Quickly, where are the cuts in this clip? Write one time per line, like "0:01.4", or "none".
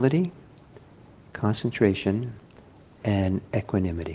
none